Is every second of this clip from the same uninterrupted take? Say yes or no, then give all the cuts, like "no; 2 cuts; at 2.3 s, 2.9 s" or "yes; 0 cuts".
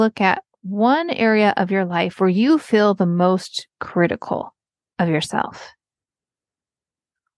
yes; 0 cuts